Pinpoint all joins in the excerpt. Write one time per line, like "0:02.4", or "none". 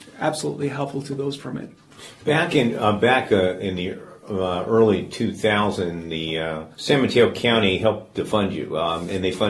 0:01.4
0:06.7